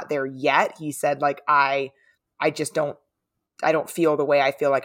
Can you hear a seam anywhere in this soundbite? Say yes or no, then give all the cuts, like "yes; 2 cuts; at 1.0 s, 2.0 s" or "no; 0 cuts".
no; 0 cuts